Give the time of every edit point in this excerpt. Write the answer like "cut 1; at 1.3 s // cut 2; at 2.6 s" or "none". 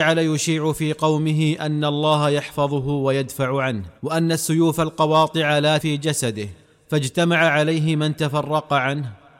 cut 1; at 4.0 s // cut 2; at 5.8 s // cut 3; at 6.6 s